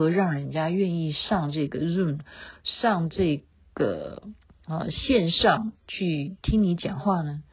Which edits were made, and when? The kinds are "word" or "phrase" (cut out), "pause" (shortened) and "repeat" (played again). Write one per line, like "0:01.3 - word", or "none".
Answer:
none